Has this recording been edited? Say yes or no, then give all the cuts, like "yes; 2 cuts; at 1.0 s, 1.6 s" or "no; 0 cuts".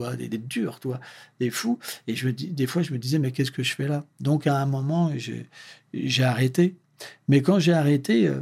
no; 0 cuts